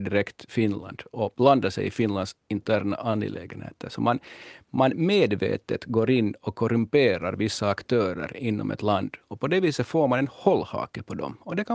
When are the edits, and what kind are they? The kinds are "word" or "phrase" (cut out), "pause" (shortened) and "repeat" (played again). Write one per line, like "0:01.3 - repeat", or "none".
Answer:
none